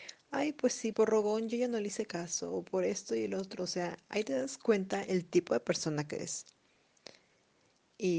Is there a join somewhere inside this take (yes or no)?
yes